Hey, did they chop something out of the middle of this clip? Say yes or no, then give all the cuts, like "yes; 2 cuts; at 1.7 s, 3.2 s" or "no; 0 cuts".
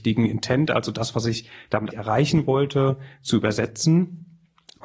yes; 1 cut; at 1.9 s